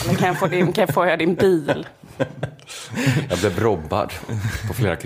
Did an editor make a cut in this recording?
no; 0 cuts

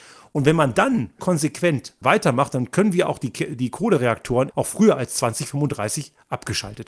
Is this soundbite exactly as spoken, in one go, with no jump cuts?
no; 3 cuts; at 1.2 s, 2.0 s, 4.5 s

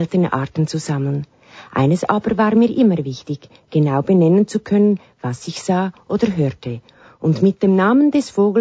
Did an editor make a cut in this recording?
no; 0 cuts

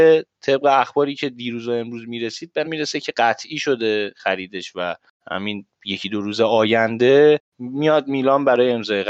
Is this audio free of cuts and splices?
no; 1 cut; at 2.6 s

